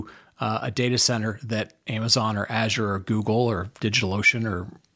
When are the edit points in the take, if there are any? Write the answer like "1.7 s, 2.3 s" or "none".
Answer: none

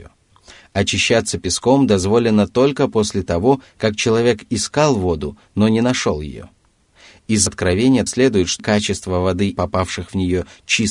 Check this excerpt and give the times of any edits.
7.5 s, 8.1 s, 8.6 s, 9.6 s

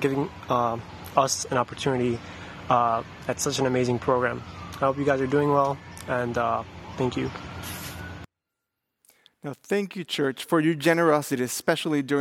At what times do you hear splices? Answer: none

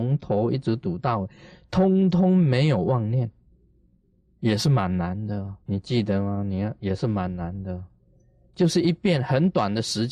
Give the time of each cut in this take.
5.6 s

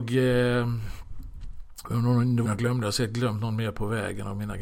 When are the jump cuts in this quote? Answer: 2.4 s

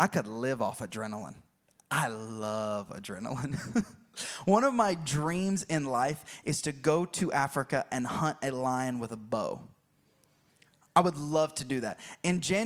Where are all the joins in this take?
none

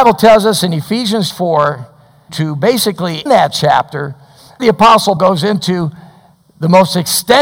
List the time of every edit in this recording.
1.3 s, 2.3 s, 3.3 s, 4.6 s, 5.2 s

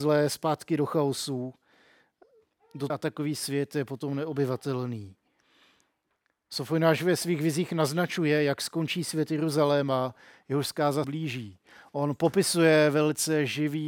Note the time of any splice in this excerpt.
2.9 s, 11.0 s

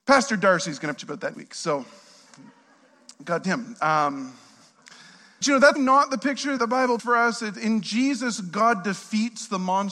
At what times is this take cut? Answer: 1.0 s, 1.3 s, 3.4 s, 5.4 s, 5.8 s, 6.6 s, 7.0 s, 7.5 s

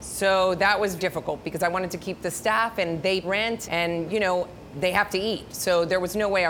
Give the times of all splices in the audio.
1.0 s, 3.2 s, 3.6 s, 4.7 s

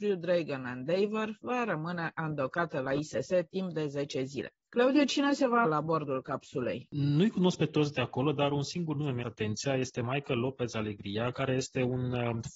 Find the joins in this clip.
5.6 s, 9.2 s

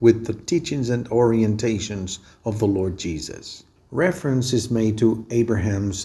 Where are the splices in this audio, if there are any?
3.8 s

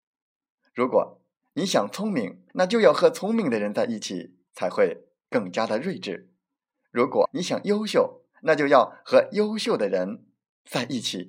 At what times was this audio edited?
2.5 s, 4.5 s, 7.2 s, 8.3 s

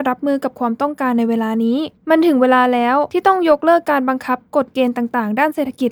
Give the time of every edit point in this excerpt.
2.0 s

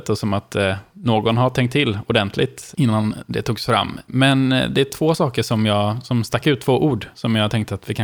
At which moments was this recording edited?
none

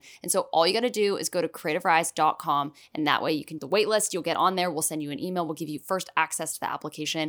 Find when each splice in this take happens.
3.6 s

